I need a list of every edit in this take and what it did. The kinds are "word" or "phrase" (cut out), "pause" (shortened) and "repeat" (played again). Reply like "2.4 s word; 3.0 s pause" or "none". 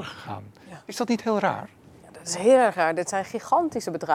none